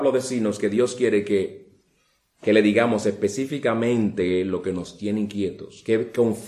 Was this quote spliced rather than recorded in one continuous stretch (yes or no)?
no